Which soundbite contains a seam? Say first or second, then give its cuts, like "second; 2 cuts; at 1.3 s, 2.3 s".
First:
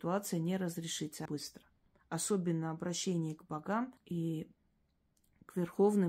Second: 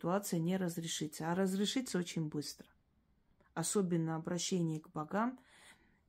first; 3 cuts; at 1.3 s, 1.8 s, 4.0 s